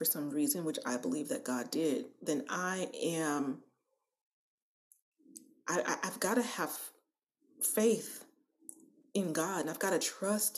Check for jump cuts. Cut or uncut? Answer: uncut